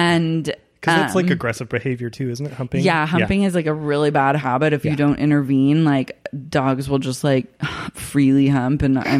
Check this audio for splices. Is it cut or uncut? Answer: uncut